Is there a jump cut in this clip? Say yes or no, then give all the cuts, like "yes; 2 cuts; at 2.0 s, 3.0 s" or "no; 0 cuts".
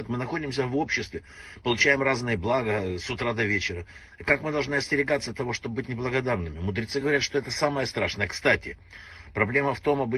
no; 0 cuts